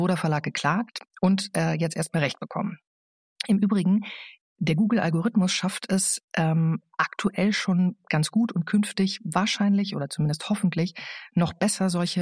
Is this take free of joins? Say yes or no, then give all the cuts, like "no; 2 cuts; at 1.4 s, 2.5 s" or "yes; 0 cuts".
yes; 0 cuts